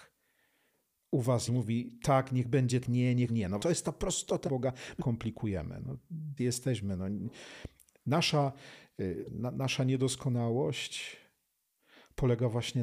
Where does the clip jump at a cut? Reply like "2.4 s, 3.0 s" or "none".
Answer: 1.5 s, 2.8 s, 3.3 s, 3.6 s, 4.5 s, 5.0 s, 6.4 s, 9.3 s